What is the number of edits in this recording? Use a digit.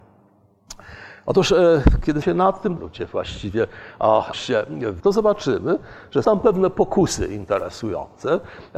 5